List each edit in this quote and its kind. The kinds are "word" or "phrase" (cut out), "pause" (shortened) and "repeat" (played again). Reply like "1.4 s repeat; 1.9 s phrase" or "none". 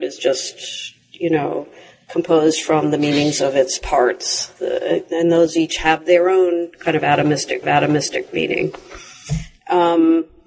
7.6 s repeat